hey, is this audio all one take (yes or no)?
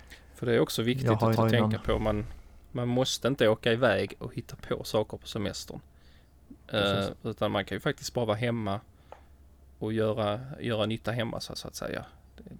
no